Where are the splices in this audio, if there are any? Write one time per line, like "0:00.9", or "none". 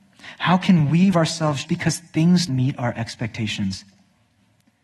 0:01.1
0:01.6
0:02.5